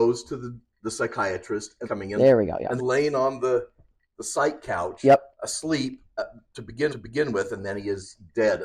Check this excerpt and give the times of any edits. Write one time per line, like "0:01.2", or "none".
0:01.8
0:02.8
0:05.3
0:06.9